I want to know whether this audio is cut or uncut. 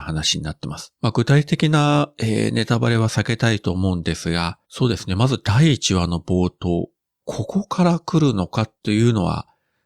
cut